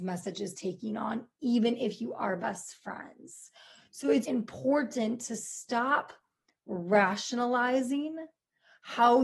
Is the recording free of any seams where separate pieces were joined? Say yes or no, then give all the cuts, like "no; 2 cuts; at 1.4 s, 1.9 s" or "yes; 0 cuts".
no; 1 cut; at 4.2 s